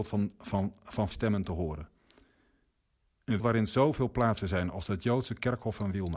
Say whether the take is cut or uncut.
cut